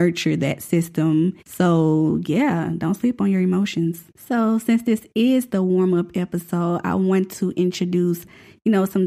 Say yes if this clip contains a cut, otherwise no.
yes